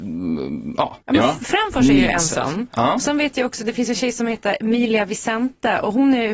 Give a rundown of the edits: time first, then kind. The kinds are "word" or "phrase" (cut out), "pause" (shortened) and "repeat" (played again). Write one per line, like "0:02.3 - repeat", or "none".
0:01.0 - pause